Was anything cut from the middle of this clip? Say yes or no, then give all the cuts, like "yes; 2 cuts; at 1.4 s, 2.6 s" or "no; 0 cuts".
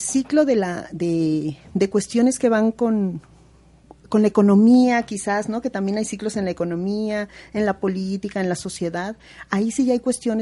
no; 0 cuts